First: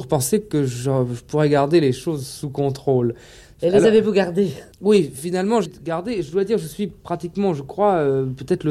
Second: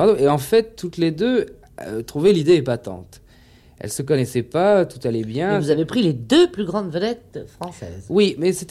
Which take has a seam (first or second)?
first